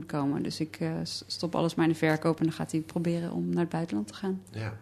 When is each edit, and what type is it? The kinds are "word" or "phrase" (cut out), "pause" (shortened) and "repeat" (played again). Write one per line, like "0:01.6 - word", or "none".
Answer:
none